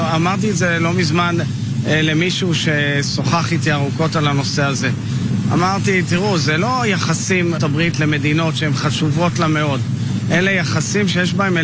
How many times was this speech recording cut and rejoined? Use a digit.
1